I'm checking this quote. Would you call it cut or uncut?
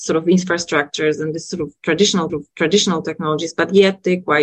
cut